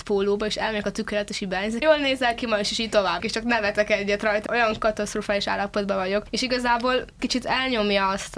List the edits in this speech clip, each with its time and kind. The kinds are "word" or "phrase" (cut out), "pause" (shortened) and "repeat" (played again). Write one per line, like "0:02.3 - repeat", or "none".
0:01.8 - phrase
0:03.2 - word
0:04.5 - word
0:07.2 - word